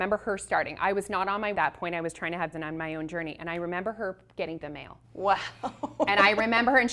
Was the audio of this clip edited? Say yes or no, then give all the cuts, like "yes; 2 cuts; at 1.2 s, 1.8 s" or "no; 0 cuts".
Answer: yes; 4 cuts; at 1.5 s, 2.5 s, 4.6 s, 5.0 s